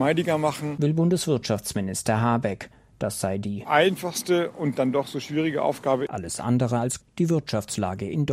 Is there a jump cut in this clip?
yes; 1 cut; at 7.0 s

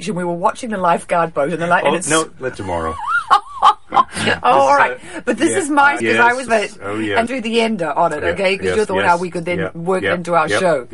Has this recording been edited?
yes; 5 cuts; at 2.5 s, 6.0 s, 6.5 s, 7.3 s, 8.9 s

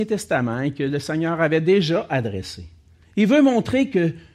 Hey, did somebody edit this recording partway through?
yes; 1 cut; at 3.0 s

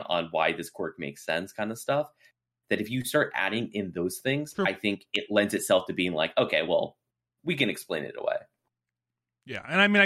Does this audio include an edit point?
no; 0 cuts

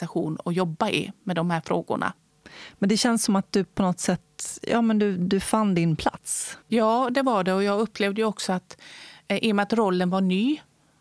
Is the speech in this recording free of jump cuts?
no; 1 cut; at 6.6 s

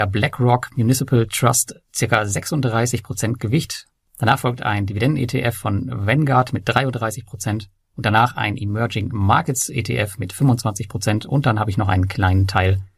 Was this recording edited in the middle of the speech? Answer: no; 0 cuts

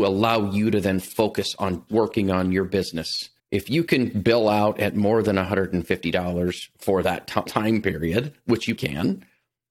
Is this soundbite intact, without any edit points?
no; 4 cuts; at 1.9 s, 3.4 s, 7.5 s, 8.8 s

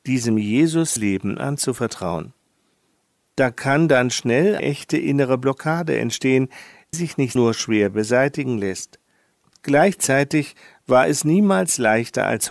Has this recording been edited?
yes; 4 cuts; at 1.0 s, 4.6 s, 6.9 s, 7.4 s

